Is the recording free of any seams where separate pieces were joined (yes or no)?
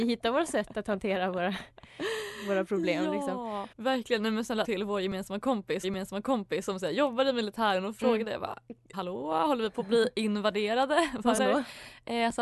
no